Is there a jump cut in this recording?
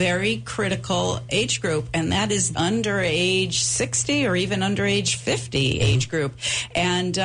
yes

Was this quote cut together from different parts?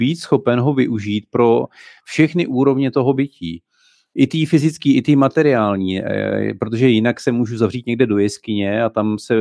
no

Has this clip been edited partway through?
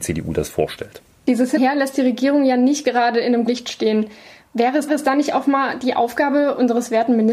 yes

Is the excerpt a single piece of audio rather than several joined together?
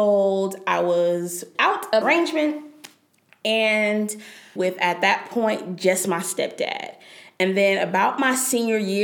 no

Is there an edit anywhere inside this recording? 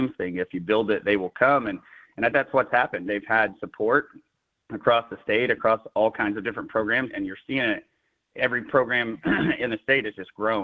yes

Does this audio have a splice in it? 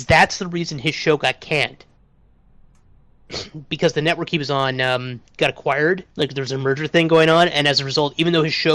yes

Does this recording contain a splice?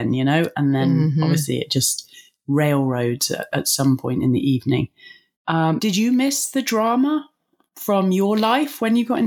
yes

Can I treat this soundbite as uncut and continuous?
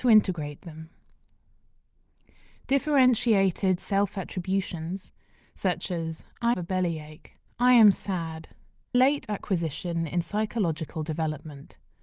no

